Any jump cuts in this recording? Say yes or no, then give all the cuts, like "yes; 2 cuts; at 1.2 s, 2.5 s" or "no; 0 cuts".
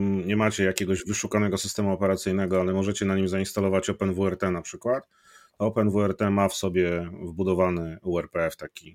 no; 0 cuts